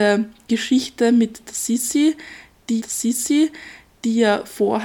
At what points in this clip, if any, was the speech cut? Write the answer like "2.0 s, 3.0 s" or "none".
2.8 s